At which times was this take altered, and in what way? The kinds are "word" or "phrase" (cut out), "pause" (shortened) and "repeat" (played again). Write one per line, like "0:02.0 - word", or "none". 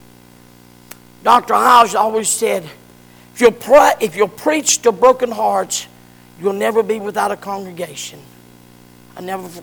none